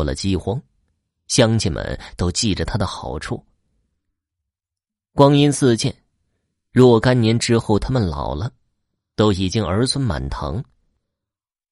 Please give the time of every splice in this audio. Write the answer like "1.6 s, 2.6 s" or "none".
none